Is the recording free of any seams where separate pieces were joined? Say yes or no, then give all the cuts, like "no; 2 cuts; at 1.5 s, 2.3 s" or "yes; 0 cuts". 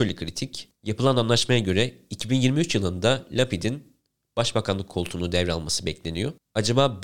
yes; 0 cuts